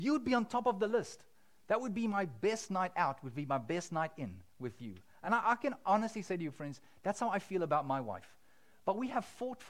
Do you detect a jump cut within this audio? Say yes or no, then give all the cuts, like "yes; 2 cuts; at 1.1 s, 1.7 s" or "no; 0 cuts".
no; 0 cuts